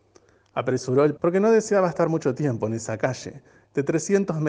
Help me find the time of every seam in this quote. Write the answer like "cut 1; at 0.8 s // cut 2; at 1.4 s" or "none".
cut 1; at 1.2 s